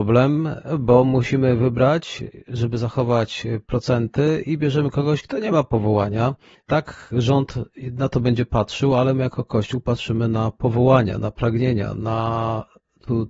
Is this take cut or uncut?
uncut